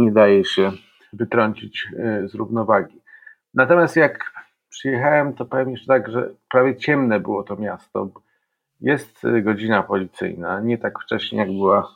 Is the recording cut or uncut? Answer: uncut